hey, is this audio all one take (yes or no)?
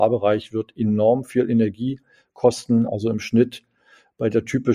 yes